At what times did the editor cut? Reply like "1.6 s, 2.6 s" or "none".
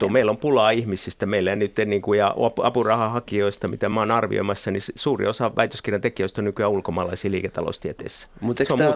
none